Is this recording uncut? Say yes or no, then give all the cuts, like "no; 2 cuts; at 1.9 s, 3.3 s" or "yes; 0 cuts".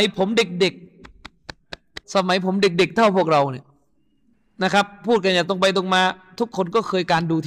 no; 2 cuts; at 2.0 s, 4.3 s